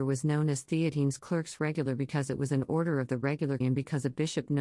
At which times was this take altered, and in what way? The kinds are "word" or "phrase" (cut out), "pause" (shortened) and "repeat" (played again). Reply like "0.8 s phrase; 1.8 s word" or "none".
3.6 s word